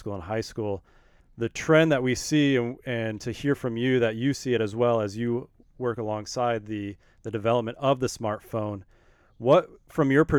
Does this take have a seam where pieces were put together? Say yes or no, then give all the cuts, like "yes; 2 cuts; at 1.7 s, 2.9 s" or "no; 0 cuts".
no; 0 cuts